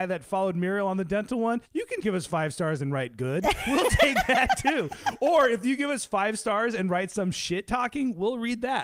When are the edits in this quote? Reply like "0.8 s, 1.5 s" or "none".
1.6 s, 2.0 s